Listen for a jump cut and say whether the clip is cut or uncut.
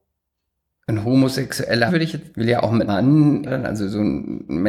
cut